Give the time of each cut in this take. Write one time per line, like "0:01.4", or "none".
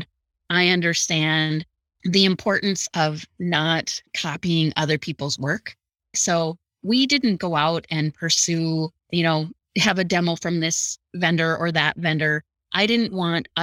0:04.1
0:09.0
0:09.6